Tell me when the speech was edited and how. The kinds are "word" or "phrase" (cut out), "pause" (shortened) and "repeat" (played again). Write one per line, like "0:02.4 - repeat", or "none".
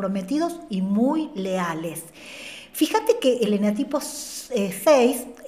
none